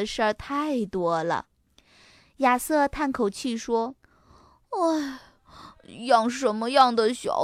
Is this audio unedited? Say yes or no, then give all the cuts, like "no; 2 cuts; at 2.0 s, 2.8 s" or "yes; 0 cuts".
no; 2 cuts; at 1.5 s, 4.0 s